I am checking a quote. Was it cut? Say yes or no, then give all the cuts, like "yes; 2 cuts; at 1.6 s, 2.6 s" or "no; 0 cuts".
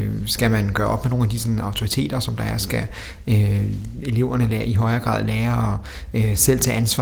no; 0 cuts